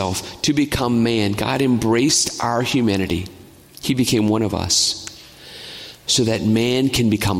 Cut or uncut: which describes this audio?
uncut